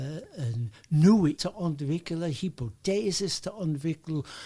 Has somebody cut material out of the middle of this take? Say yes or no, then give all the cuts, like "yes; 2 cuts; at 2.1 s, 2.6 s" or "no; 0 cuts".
yes; 1 cut; at 1.4 s